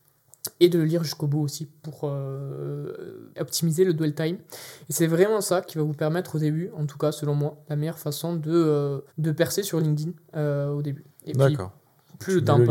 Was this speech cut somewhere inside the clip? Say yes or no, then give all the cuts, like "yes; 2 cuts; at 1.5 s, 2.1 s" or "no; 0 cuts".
yes; 2 cuts; at 3.3 s, 9.1 s